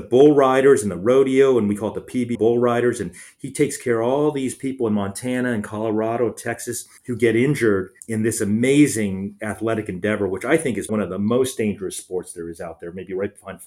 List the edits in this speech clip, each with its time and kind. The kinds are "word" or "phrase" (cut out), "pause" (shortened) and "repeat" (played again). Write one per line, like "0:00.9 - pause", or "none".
0:02.3 - phrase
0:07.0 - pause
0:08.0 - word
0:10.9 - word